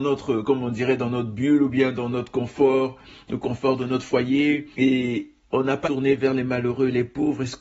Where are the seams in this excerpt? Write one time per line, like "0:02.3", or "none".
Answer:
0:02.1
0:04.7
0:05.8

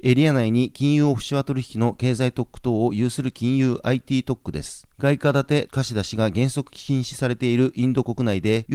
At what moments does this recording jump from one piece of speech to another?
none

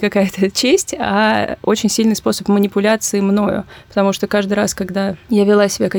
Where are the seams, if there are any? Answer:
none

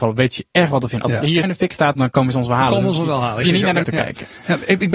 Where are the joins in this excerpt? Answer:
0:01.4
0:02.0
0:03.4
0:03.8

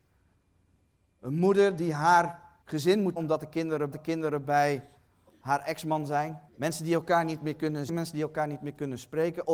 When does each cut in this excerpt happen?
0:02.6
0:03.2
0:03.9
0:06.5
0:07.9

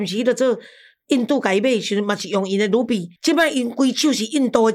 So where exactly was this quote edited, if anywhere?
0:03.2

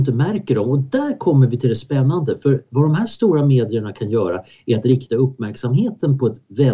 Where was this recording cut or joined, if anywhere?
none

